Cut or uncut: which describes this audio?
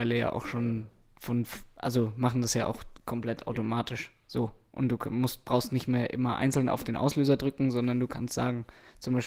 uncut